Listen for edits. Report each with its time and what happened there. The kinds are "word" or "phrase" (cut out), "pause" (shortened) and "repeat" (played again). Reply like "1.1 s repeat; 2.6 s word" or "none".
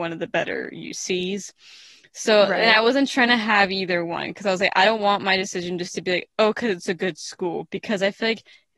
none